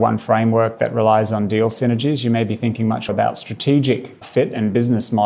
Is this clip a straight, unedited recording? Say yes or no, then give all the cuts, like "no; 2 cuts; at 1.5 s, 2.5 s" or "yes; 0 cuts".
no; 2 cuts; at 3.1 s, 4.2 s